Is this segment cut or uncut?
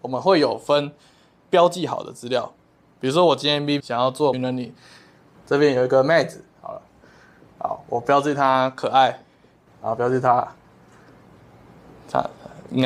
cut